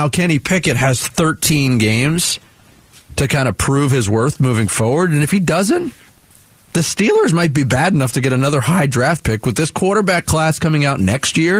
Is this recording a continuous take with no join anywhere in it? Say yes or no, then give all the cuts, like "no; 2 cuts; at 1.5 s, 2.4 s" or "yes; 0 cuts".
yes; 0 cuts